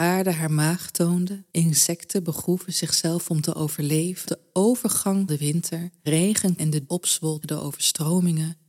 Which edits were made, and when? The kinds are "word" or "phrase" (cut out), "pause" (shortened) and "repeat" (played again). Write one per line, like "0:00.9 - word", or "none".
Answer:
0:01.5 - pause
0:04.3 - phrase
0:05.3 - word
0:06.1 - word
0:06.6 - word
0:06.9 - word
0:07.4 - word